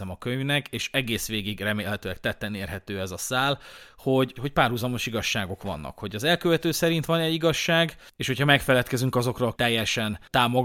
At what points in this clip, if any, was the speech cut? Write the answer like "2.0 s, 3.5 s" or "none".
4.4 s, 9.5 s